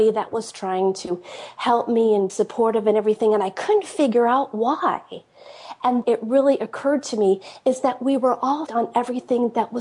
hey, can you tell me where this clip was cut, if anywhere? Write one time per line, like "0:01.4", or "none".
0:02.3
0:06.0
0:08.7